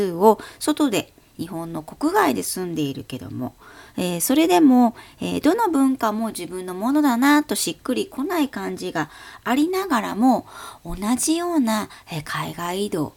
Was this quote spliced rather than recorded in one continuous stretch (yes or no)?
no